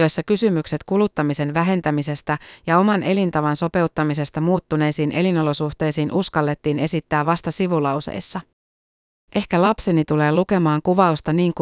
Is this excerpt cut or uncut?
uncut